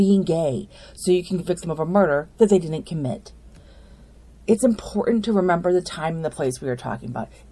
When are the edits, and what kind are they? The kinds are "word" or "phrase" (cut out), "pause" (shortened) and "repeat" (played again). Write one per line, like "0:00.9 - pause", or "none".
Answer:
none